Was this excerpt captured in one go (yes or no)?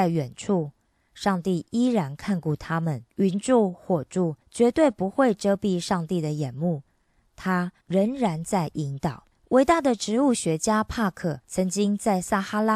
no